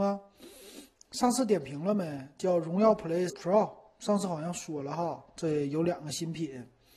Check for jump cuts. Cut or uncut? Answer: cut